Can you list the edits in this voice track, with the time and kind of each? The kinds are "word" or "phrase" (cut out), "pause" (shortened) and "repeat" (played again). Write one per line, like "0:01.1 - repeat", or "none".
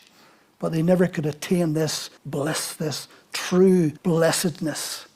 0:02.2 - pause
0:04.0 - pause